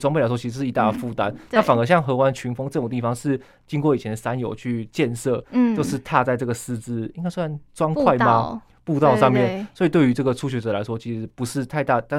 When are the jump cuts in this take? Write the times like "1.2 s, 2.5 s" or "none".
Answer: none